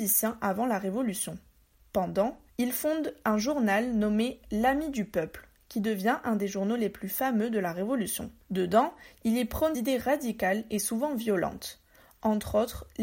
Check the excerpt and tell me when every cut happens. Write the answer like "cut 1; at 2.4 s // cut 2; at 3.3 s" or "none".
cut 1; at 2.5 s // cut 2; at 8.4 s // cut 3; at 9.7 s